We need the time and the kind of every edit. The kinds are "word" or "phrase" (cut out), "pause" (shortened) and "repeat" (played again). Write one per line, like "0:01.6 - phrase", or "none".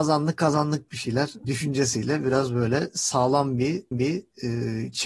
0:01.4 - word
0:03.9 - repeat